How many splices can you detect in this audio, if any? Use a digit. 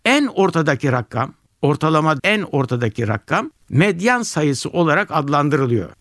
1